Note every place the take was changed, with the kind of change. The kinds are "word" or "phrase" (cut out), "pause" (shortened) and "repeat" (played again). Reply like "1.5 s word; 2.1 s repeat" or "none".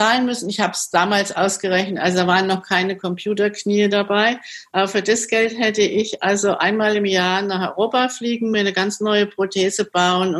none